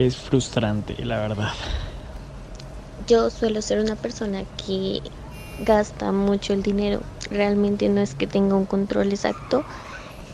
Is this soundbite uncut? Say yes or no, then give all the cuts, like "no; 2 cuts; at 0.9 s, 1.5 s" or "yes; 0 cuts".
yes; 0 cuts